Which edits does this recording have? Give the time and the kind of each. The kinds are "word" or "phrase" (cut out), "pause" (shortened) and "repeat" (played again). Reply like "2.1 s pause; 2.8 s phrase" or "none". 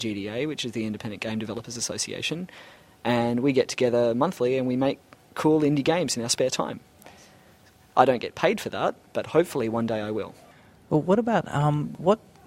none